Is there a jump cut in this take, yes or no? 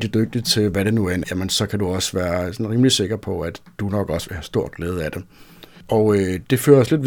yes